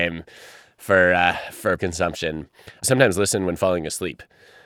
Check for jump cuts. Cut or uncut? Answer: cut